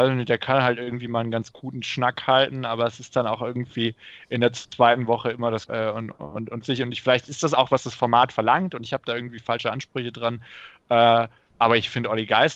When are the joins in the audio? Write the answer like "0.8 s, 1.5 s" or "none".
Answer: 5.7 s, 6.6 s, 11.5 s